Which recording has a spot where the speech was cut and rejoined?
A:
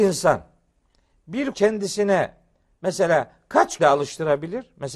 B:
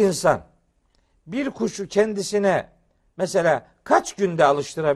A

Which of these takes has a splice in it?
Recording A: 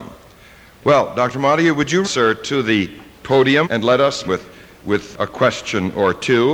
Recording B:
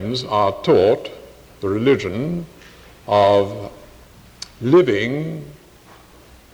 A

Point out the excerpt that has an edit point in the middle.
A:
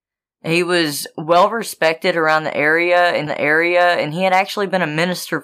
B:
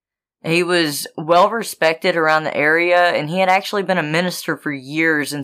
A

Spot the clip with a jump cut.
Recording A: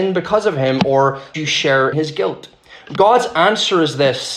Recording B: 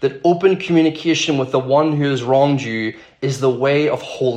A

